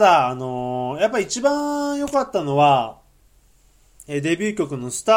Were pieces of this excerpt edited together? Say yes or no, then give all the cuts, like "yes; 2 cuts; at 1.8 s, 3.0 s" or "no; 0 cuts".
no; 0 cuts